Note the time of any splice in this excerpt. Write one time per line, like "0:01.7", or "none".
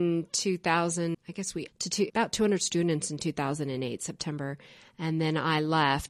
0:01.1
0:01.7
0:02.1

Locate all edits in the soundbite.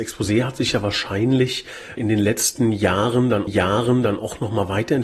0:02.0
0:03.5

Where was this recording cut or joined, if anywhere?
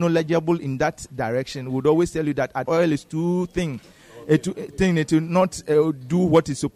0:02.7

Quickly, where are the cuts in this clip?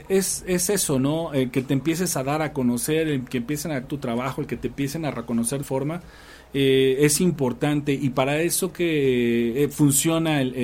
0:03.8
0:05.6
0:08.7

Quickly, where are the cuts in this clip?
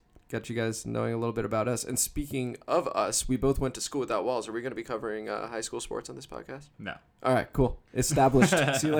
0:06.7

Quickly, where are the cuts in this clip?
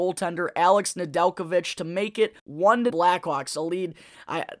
0:02.4
0:02.9

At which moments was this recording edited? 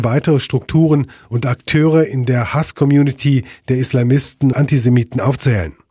0:04.5

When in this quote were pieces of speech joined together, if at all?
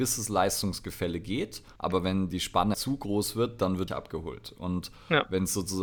0:01.8
0:02.7
0:03.9

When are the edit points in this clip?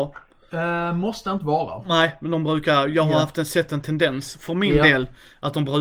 none

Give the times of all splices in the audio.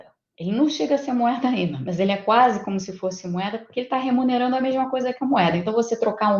none

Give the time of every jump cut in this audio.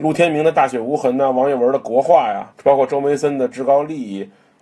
0:02.5

